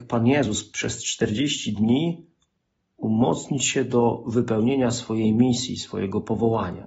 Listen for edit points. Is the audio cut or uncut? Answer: uncut